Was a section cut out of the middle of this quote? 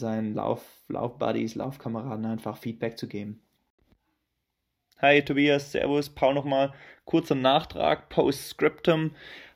no; 0 cuts

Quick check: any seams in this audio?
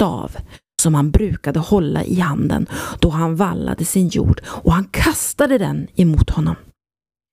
no; 0 cuts

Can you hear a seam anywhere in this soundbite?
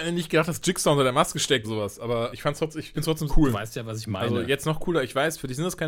yes; 4 cuts; at 1.6 s, 2.3 s, 2.9 s, 3.3 s

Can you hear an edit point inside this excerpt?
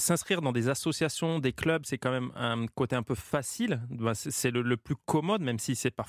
no; 0 cuts

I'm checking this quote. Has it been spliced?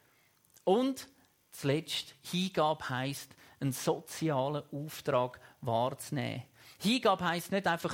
no; 0 cuts

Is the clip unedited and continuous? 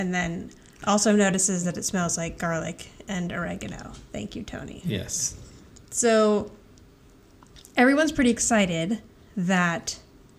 yes; 0 cuts

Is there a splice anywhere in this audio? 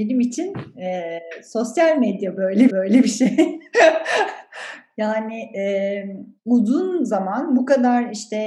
yes; 2 cuts; at 2.7 s, 6.4 s

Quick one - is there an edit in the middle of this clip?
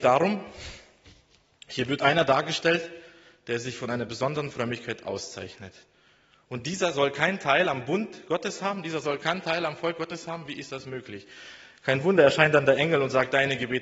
no; 0 cuts

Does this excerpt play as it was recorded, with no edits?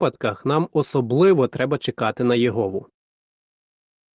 yes; 0 cuts

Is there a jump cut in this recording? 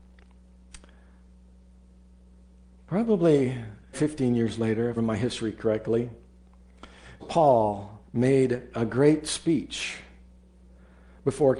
yes; 4 cuts; at 3.9 s, 5.0 s, 7.2 s, 8.0 s

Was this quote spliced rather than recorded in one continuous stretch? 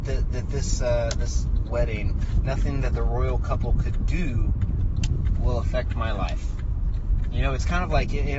yes; 1 cut; at 1.7 s

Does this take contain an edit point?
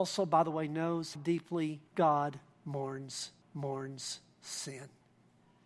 yes; 3 cuts; at 1.1 s, 1.9 s, 3.4 s

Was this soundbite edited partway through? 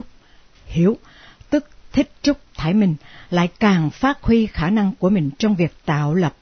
no; 0 cuts

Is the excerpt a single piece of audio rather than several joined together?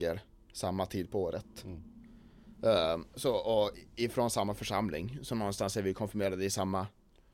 yes; 0 cuts

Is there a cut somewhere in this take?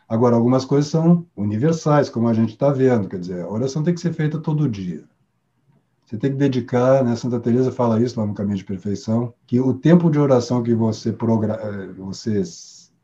yes; 2 cuts; at 1.3 s, 9.4 s

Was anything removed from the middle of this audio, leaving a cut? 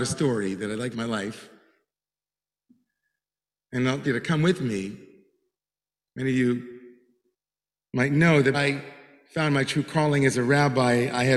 yes; 3 cuts; at 0.9 s, 4.0 s, 8.5 s

